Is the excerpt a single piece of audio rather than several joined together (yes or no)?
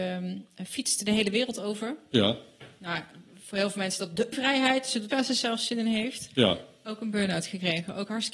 no